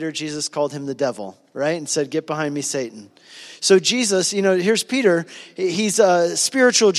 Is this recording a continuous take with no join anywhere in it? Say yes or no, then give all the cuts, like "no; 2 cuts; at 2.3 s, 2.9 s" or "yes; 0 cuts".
yes; 0 cuts